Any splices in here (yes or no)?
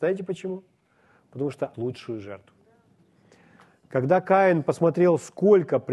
yes